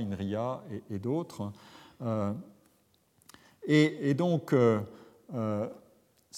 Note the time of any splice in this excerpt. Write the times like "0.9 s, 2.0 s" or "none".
none